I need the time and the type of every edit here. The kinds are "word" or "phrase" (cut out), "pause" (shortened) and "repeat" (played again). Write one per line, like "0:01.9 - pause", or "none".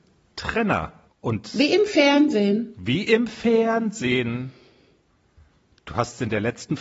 0:01.1 - pause